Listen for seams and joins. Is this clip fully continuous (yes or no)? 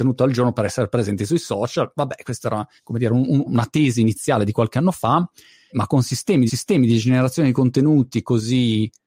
no